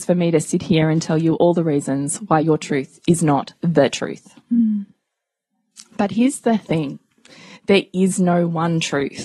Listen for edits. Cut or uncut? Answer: uncut